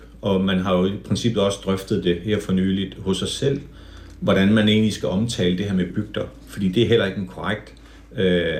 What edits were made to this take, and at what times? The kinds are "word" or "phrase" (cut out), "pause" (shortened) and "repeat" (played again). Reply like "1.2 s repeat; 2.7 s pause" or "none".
5.9 s word